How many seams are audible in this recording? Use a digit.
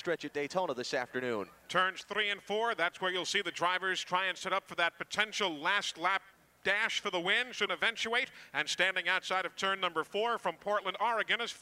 1